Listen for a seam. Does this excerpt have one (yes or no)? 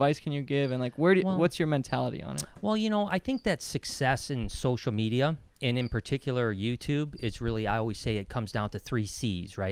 no